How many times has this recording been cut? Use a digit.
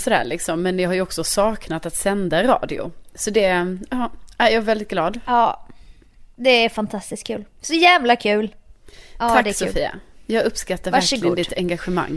0